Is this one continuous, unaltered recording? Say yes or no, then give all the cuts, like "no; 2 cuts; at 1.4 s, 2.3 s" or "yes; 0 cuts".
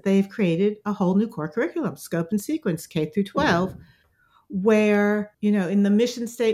no; 1 cut; at 5.3 s